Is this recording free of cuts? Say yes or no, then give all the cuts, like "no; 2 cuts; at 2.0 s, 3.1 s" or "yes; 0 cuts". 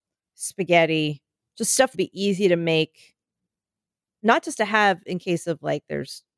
no; 2 cuts; at 1.4 s, 1.9 s